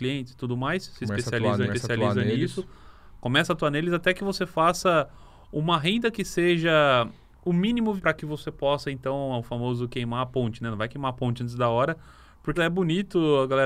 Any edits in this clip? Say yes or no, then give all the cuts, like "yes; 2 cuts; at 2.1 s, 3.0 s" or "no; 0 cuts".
yes; 3 cuts; at 1.7 s, 8.0 s, 12.6 s